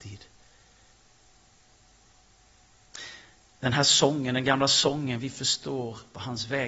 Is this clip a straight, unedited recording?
yes; 0 cuts

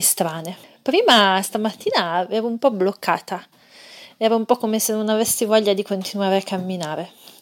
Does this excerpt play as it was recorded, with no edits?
yes; 0 cuts

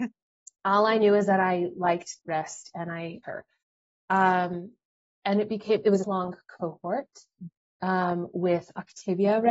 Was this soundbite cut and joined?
yes; 3 cuts; at 2.2 s, 3.2 s, 6.0 s

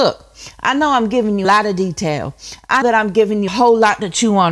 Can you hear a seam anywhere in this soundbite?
yes; 3 cuts; at 1.4 s, 2.8 s, 3.5 s

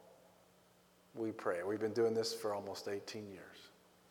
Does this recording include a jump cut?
no; 0 cuts

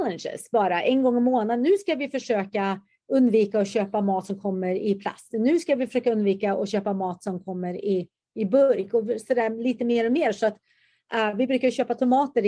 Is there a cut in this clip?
no; 0 cuts

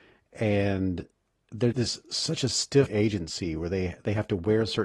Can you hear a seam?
yes; 2 cuts; at 1.7 s, 2.9 s

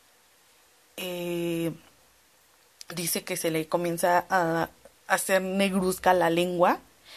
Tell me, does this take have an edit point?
no; 0 cuts

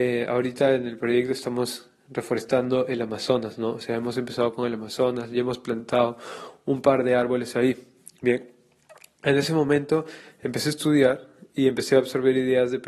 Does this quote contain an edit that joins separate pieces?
no; 0 cuts

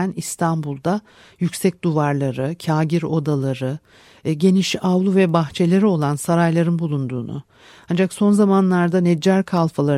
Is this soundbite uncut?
yes; 0 cuts

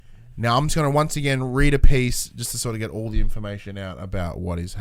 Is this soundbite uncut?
yes; 0 cuts

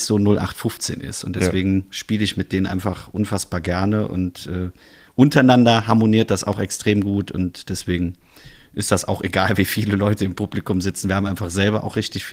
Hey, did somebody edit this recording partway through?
no; 0 cuts

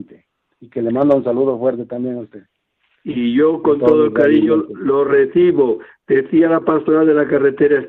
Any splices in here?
no; 0 cuts

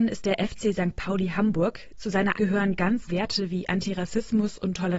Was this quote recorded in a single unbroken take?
no; 2 cuts; at 2.3 s, 3.1 s

